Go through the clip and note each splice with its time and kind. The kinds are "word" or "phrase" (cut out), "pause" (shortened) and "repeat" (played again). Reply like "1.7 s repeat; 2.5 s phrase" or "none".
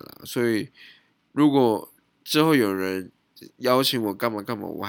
none

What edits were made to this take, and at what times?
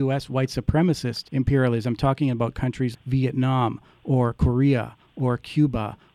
1.3 s pause; 2.9 s word

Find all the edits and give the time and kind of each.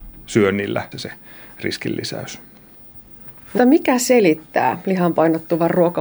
0.9 s word; 3.6 s word

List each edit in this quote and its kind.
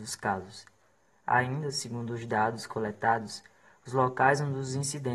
none

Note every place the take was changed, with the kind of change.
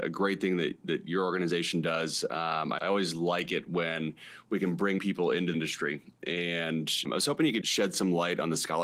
2.8 s word; 5.0 s word; 5.5 s word; 7.0 s word; 7.6 s word

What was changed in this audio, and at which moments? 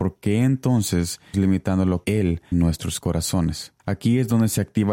1.3 s word; 2.0 s word; 2.5 s phrase; 3.8 s pause

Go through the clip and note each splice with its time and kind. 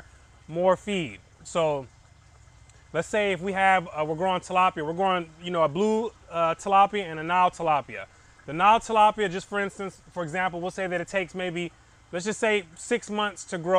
none

